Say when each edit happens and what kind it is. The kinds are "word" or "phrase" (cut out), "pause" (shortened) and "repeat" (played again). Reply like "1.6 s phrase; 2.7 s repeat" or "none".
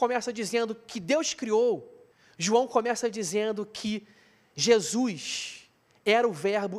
2.1 s pause